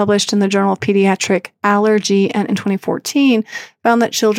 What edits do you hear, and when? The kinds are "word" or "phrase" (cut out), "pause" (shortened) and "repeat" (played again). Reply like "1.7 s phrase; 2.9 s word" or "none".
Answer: 2.5 s word

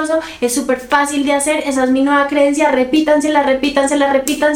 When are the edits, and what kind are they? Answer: none

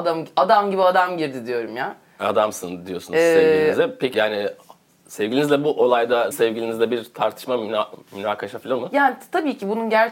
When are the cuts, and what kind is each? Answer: 4.1 s word; 6.3 s word; 8.8 s word

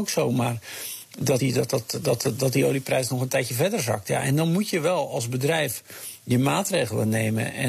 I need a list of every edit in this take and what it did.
1.4 s phrase

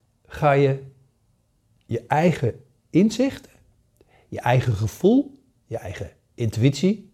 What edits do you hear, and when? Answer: none

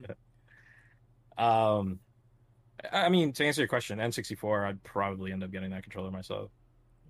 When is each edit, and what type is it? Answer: none

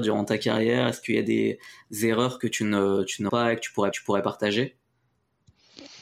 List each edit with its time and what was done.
3.3 s word; 3.9 s repeat

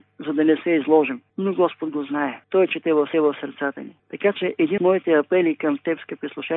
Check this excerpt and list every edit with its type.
1.3 s pause; 2.4 s pause; 3.1 s repeat; 4.0 s pause; 4.8 s word

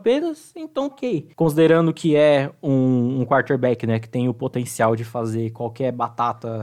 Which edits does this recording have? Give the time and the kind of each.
0.9 s phrase

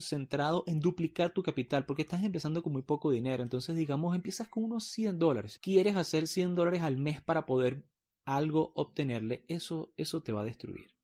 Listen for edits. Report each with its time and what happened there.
5.6 s word

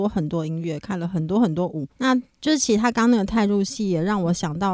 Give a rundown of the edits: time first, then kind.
1.9 s pause

